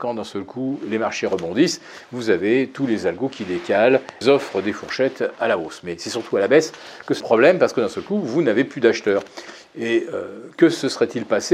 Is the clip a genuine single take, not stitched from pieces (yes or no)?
no